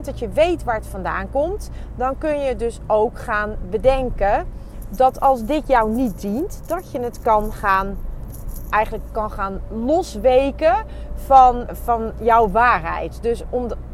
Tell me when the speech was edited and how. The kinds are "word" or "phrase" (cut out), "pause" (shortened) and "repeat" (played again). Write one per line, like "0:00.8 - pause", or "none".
0:11.7 - word